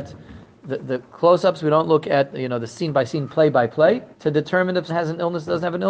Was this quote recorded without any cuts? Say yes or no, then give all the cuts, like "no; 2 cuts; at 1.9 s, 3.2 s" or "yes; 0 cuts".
no; 2 cuts; at 4.1 s, 4.9 s